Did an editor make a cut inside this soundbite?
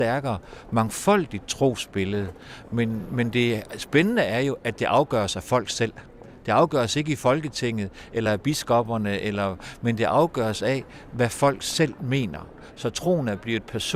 no; 0 cuts

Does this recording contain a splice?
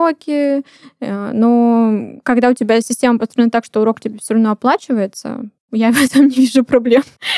no; 0 cuts

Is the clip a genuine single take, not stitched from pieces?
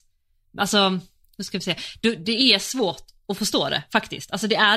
yes; 0 cuts

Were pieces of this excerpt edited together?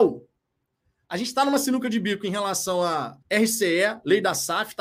yes; 1 cut; at 3.2 s

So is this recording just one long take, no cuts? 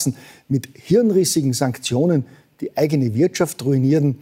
yes; 0 cuts

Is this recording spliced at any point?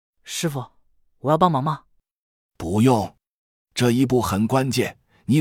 no; 0 cuts

